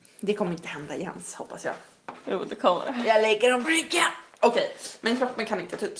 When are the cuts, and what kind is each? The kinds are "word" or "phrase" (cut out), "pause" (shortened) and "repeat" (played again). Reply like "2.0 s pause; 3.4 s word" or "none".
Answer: 3.6 s word